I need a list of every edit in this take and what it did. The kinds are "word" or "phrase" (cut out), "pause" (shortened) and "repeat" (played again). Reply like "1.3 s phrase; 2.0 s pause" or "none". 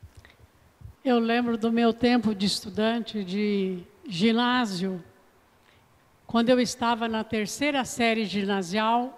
0.9 s pause